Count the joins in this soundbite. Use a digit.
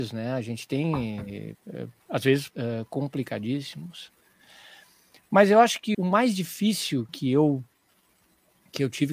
4